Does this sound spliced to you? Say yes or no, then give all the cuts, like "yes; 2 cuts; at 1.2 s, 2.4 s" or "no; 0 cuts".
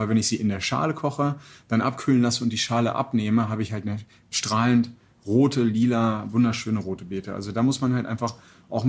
no; 0 cuts